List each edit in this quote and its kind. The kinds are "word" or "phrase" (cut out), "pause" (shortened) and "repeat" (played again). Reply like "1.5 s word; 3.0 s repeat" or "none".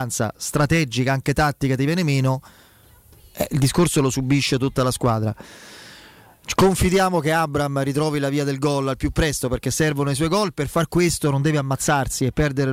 none